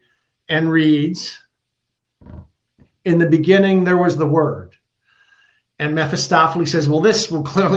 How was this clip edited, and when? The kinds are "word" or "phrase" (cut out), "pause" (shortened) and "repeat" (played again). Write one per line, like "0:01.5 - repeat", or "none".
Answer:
none